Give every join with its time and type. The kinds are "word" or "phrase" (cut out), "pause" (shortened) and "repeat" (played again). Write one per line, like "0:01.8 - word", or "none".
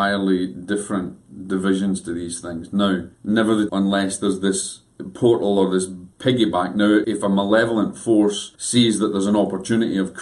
0:03.1 - pause
0:03.7 - phrase
0:06.1 - pause
0:07.0 - word
0:08.6 - pause